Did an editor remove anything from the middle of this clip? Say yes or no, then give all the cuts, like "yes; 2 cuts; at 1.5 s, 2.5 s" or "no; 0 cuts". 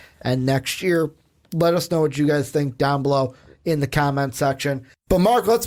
no; 0 cuts